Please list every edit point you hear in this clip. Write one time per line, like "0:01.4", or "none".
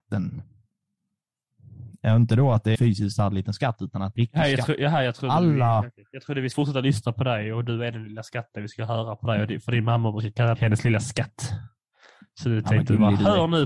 0:02.7
0:04.2
0:06.5
0:10.5